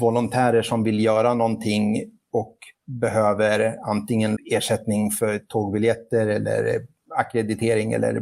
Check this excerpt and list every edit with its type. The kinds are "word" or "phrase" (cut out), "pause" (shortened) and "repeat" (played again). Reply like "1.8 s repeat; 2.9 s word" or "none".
2.7 s pause; 4.4 s phrase

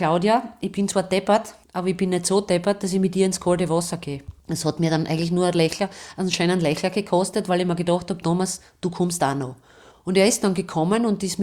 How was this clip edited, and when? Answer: 1.6 s pause; 4.4 s pause; 9.9 s pause

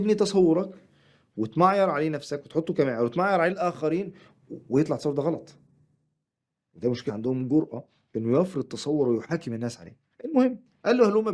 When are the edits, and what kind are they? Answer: 7.1 s phrase

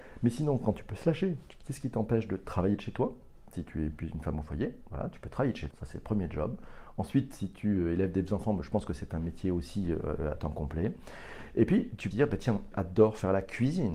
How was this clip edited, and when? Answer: 5.7 s word; 12.1 s phrase; 12.7 s word

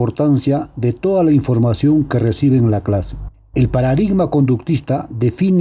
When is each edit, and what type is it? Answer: none

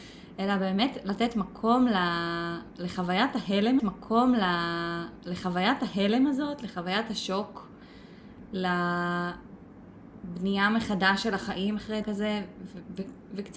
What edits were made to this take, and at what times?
3.8 s repeat; 12.0 s word

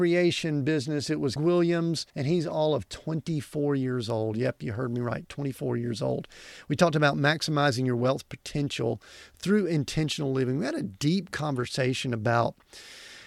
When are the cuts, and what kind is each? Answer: 1.4 s word; 2.1 s pause

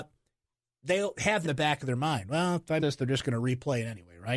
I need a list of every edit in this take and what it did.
1.4 s word; 2.8 s word

